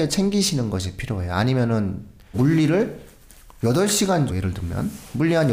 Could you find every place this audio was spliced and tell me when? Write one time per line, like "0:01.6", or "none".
0:02.3
0:04.3

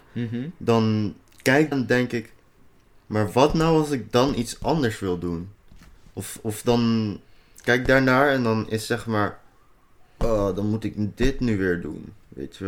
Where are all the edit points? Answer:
0:01.7

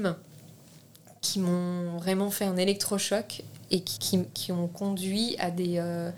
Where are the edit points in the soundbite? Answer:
0:04.0

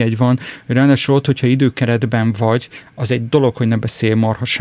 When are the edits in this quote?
none

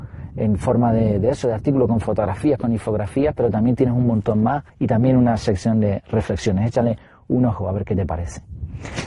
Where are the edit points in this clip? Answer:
0:04.7

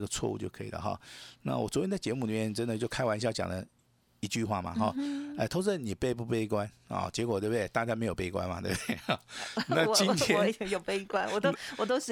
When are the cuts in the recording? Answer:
none

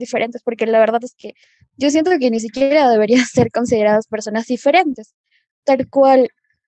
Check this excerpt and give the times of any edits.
none

